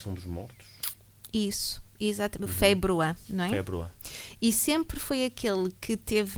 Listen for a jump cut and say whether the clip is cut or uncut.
uncut